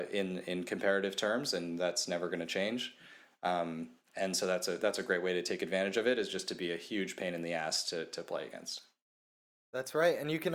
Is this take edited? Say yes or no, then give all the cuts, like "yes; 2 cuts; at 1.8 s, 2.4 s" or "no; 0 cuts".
no; 0 cuts